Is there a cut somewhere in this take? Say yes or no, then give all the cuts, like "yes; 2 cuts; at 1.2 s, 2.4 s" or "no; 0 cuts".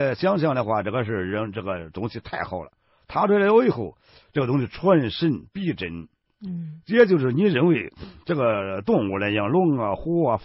no; 0 cuts